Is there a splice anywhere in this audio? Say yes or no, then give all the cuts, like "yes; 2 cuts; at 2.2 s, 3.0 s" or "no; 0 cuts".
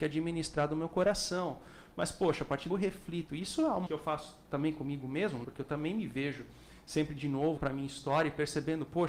yes; 4 cuts; at 2.7 s, 3.9 s, 5.4 s, 7.6 s